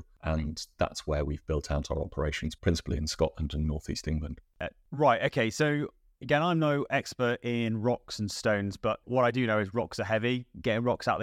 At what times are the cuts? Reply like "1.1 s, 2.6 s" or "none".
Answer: none